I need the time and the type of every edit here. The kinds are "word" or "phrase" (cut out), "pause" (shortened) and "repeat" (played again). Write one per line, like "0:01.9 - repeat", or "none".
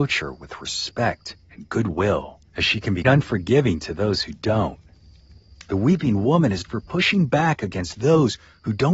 0:01.4 - pause
0:02.5 - pause
0:03.0 - word
0:06.6 - word